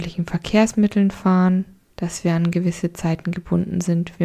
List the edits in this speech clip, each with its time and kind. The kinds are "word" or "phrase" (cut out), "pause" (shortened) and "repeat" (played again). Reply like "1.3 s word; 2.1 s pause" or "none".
none